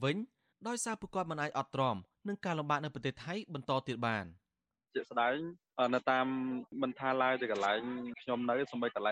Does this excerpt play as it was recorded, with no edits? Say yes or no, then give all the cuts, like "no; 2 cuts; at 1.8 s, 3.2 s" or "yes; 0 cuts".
yes; 0 cuts